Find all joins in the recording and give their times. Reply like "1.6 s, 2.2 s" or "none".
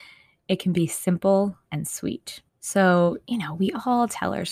1.7 s, 2.5 s